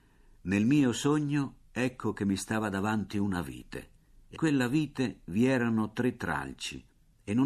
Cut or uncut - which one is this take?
cut